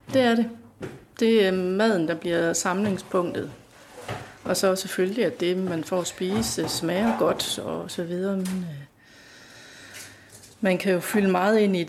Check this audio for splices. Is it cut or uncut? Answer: cut